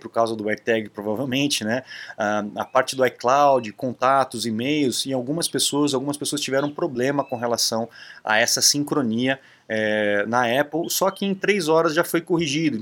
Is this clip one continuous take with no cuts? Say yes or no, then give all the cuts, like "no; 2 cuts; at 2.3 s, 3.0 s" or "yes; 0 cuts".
yes; 0 cuts